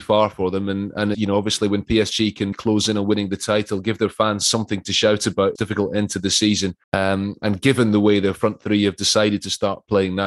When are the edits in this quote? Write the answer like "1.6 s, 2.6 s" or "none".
1.1 s, 2.5 s, 5.6 s, 6.8 s